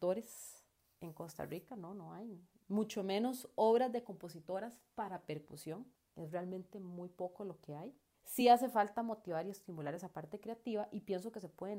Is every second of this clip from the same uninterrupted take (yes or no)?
yes